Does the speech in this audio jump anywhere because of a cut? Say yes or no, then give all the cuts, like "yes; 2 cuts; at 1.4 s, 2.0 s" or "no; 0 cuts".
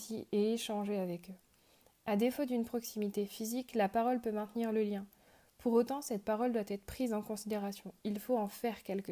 no; 0 cuts